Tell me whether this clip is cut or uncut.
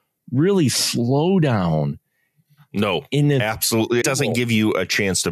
cut